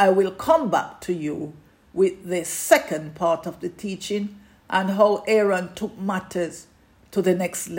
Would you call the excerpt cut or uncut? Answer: uncut